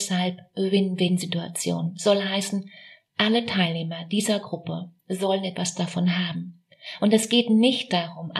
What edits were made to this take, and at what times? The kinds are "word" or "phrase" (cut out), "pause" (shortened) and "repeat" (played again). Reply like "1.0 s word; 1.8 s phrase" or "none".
none